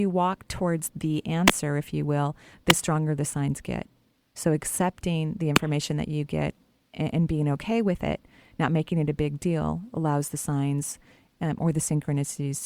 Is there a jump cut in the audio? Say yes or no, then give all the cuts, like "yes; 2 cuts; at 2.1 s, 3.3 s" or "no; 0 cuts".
no; 0 cuts